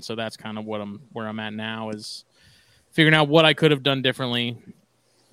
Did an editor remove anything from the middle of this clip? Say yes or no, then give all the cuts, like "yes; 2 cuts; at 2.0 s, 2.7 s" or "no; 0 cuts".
no; 0 cuts